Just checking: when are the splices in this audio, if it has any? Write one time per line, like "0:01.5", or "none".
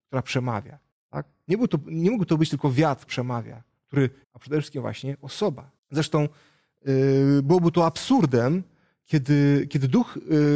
0:00.9
0:03.1
0:04.2
0:05.8